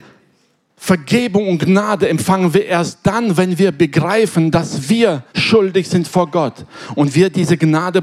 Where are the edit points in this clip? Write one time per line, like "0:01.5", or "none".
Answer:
0:05.3